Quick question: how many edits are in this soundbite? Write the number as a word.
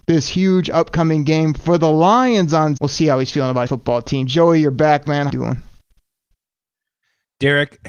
three